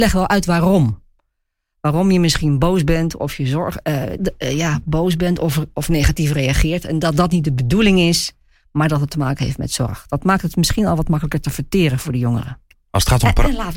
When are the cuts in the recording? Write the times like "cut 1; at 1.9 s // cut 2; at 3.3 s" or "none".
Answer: cut 1; at 4.2 s